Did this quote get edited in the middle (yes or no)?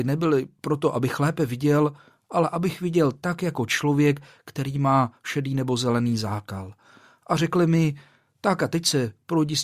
no